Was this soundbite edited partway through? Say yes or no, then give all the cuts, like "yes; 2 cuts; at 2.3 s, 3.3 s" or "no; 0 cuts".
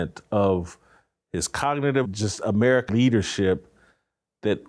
yes; 2 cuts; at 2.0 s, 2.9 s